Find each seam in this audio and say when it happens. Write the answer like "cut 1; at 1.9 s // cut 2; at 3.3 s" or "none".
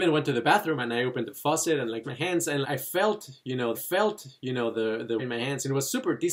cut 1; at 2.0 s // cut 2; at 2.6 s // cut 3; at 3.7 s // cut 4; at 5.2 s